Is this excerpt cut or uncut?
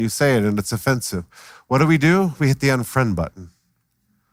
uncut